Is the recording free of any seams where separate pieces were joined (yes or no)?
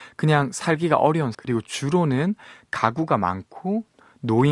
no